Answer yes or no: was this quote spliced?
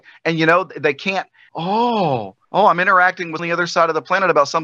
yes